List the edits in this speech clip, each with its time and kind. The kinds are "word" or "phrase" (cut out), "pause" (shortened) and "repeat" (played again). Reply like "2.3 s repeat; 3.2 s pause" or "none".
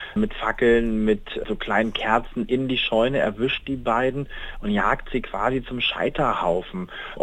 none

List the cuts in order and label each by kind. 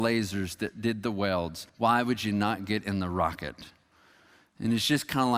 1.7 s pause

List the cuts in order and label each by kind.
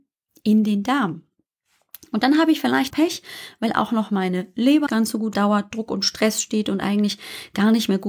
2.9 s word; 4.9 s word; 5.3 s phrase

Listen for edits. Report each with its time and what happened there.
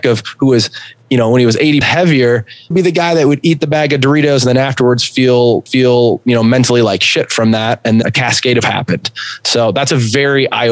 1.8 s word; 2.7 s phrase; 5.7 s repeat; 8.0 s word; 8.6 s phrase

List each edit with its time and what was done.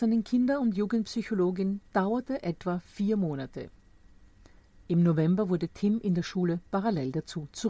none

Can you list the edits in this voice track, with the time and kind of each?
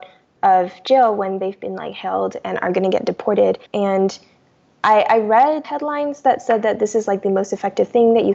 3.7 s pause; 5.6 s word

